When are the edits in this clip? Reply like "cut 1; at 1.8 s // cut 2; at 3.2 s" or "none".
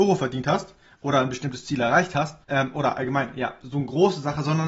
cut 1; at 2.4 s